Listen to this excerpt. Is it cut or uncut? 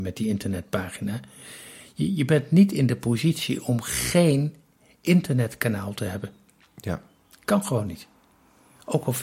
uncut